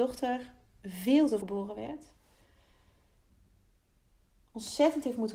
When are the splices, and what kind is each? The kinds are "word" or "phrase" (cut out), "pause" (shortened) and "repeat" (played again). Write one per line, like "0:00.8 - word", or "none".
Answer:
0:01.4 - word